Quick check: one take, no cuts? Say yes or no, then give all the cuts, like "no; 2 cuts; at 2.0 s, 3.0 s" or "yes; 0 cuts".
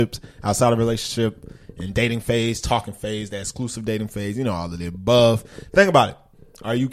yes; 0 cuts